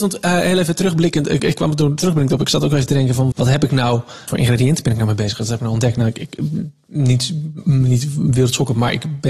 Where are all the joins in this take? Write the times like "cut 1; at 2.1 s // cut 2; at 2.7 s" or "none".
cut 1; at 1.4 s // cut 2; at 3.3 s // cut 3; at 4.3 s